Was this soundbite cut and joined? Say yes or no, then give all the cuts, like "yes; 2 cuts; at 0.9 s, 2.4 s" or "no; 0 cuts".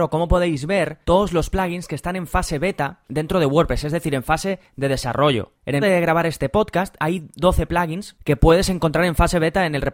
yes; 3 cuts; at 1.0 s, 5.8 s, 7.0 s